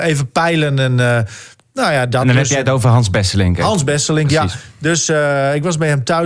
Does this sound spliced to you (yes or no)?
no